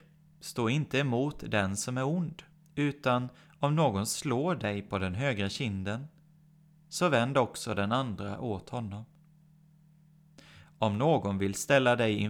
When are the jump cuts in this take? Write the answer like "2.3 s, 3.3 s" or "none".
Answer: 2.5 s